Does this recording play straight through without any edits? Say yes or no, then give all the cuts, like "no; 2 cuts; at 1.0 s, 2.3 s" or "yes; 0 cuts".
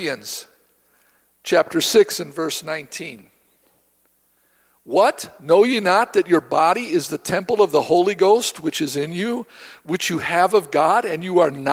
yes; 0 cuts